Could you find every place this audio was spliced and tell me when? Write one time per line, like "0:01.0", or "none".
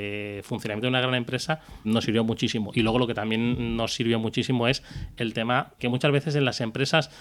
0:01.8
0:05.8